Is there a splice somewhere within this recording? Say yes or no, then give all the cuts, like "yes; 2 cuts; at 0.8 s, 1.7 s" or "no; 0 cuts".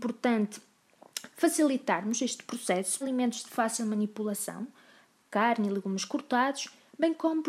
yes; 1 cut; at 3.0 s